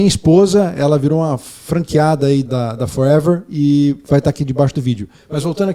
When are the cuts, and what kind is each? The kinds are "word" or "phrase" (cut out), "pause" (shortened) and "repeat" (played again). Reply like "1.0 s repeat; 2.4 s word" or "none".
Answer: 2.5 s word

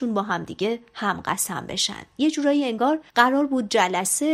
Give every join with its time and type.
3.1 s pause

